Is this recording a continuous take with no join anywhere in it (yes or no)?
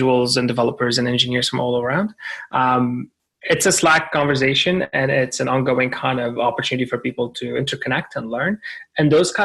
yes